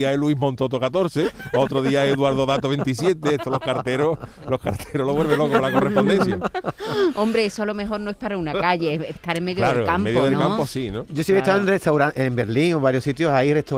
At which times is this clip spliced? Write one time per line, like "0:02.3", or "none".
0:09.2